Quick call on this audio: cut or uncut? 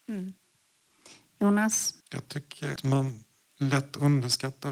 cut